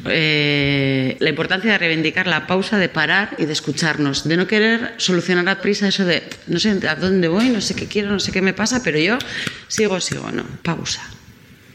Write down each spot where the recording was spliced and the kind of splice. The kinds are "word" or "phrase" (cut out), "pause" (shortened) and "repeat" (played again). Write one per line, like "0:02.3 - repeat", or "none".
0:01.2 - word
0:05.6 - word
0:10.0 - word
0:10.6 - pause